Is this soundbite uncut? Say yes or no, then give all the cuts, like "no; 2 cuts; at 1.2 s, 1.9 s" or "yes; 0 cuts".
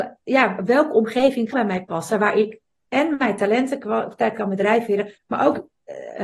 no; 3 cuts; at 1.5 s, 4.3 s, 5.2 s